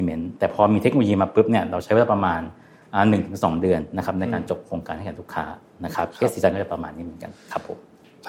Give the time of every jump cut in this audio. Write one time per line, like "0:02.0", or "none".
none